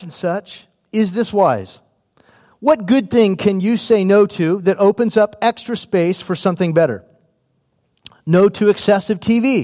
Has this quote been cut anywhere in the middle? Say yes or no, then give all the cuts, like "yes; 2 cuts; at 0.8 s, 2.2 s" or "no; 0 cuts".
no; 0 cuts